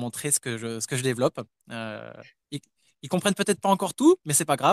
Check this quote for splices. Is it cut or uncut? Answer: uncut